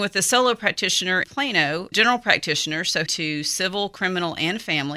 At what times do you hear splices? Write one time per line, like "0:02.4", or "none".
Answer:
0:01.2
0:01.9
0:03.1